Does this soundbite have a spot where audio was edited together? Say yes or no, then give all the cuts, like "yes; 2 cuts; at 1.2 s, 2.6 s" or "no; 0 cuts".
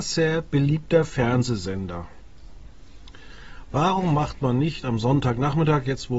no; 0 cuts